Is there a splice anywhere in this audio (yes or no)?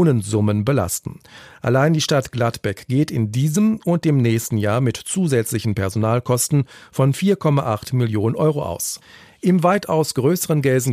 no